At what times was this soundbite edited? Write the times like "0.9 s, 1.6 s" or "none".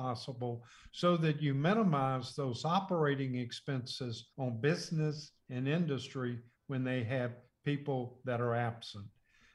4.3 s